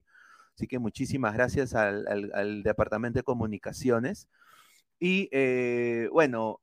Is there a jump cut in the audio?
no; 0 cuts

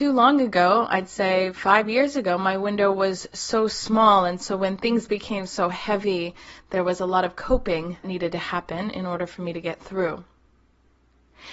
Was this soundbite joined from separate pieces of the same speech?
yes; 1 cut; at 8.0 s

